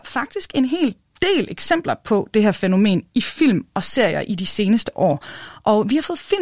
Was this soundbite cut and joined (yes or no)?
no